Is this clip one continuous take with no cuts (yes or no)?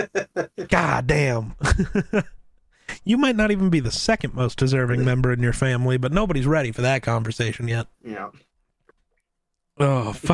no